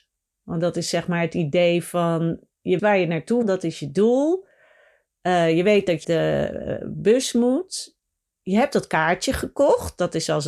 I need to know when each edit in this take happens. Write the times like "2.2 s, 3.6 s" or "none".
2.8 s, 3.4 s, 6.0 s